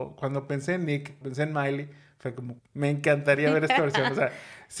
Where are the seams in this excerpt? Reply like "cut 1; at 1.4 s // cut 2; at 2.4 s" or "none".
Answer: cut 1; at 1.2 s // cut 2; at 2.6 s